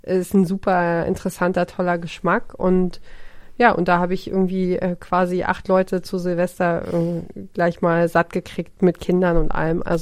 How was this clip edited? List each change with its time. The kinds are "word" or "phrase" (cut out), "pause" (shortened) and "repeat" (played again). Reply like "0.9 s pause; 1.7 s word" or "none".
none